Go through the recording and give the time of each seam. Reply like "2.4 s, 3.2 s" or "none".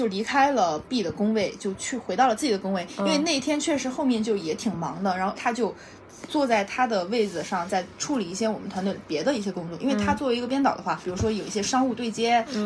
5.4 s, 11.0 s